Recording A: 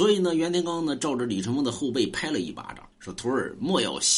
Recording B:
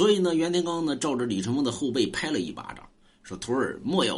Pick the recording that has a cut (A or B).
A